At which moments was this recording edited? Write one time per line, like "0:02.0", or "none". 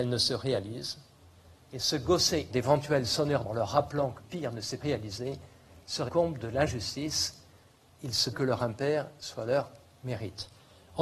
0:02.5
0:03.4
0:04.2
0:04.8
0:06.1
0:08.3